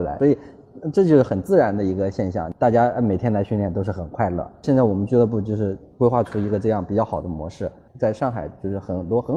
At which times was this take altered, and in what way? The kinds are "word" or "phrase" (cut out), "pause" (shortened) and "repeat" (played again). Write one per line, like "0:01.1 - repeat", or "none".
none